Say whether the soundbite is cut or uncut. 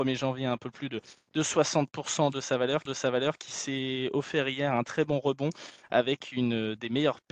cut